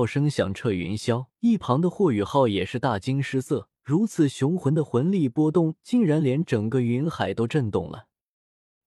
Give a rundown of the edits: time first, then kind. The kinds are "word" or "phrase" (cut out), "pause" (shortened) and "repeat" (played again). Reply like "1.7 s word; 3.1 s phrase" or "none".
1.3 s pause; 3.7 s pause